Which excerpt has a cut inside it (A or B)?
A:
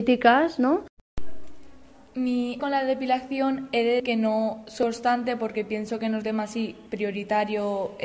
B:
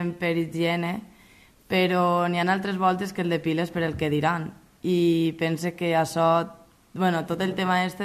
A